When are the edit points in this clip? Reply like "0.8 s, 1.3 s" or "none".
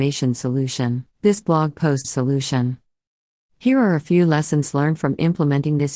1.1 s, 2.0 s